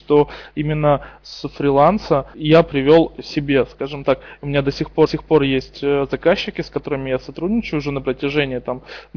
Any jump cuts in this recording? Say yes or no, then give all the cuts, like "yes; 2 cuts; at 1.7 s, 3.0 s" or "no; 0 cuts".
yes; 2 cuts; at 2.3 s, 5.1 s